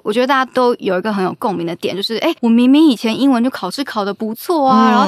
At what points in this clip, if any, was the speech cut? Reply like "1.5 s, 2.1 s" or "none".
2.4 s